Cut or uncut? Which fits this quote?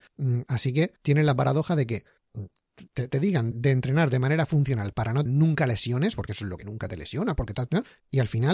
cut